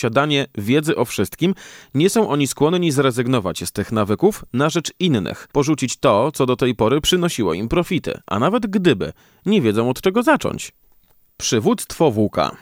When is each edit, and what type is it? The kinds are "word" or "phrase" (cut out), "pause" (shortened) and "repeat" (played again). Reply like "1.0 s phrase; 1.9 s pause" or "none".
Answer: 5.5 s pause

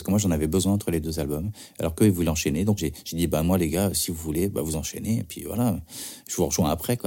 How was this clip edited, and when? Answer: 2.8 s word

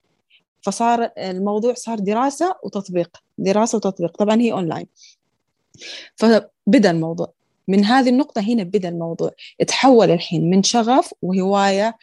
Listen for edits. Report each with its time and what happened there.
7.5 s pause

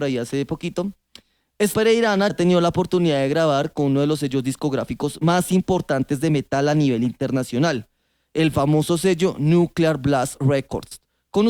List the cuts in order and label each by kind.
1.7 s word; 2.3 s word

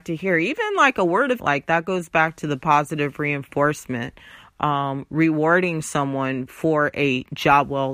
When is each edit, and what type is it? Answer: 1.4 s word

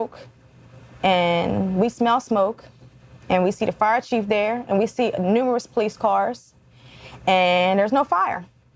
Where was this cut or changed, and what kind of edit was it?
none

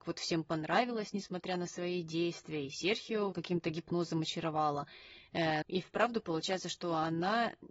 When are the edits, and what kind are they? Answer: 3.3 s phrase; 5.6 s word

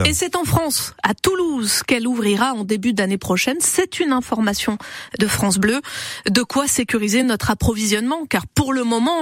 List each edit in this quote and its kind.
none

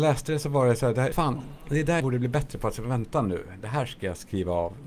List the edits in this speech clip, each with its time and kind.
1.1 s word; 2.0 s word

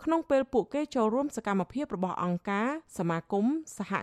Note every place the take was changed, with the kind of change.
2.9 s pause

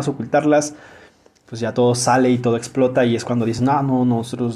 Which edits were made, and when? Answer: none

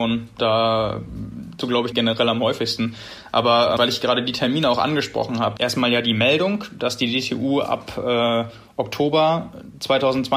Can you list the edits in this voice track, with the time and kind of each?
1.6 s word; 1.9 s phrase; 3.8 s word; 5.6 s phrase

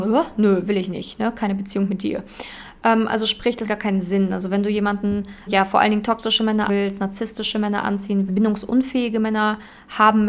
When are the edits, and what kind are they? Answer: 3.7 s word; 5.5 s word; 6.7 s word; 8.3 s word

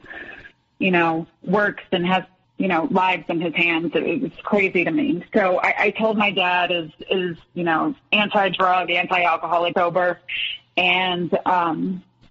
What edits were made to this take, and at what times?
1.3 s pause; 2.4 s pause; 6.3 s phrase; 9.7 s word

